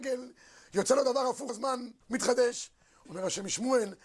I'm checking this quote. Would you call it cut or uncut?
cut